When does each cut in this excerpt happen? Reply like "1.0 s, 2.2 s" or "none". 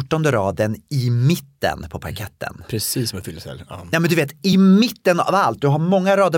none